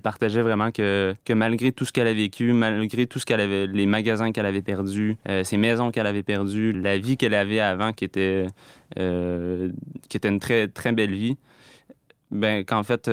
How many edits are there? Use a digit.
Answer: 3